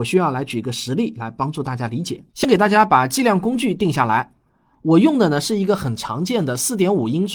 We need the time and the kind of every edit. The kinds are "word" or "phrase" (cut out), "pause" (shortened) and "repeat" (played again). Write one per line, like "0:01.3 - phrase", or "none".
0:02.3 - pause

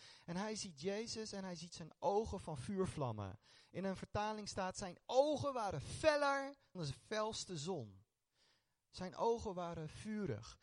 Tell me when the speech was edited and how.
0:06.7 - word

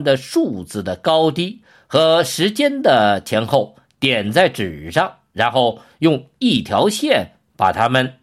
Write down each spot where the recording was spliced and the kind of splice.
none

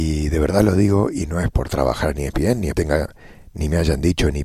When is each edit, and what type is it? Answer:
0:01.5 - word
0:02.7 - word

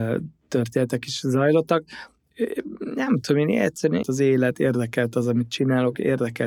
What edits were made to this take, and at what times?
0:04.0 - word

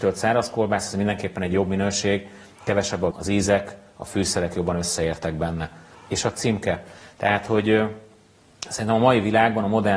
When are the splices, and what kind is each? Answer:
0:03.1 - word

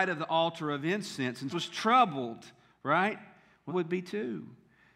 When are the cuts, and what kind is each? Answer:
0:01.5 - word
0:03.7 - word

